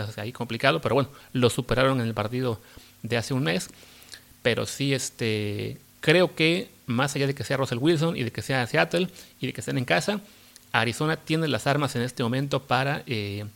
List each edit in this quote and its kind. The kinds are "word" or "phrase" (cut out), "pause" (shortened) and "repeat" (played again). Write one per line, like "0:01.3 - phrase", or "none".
none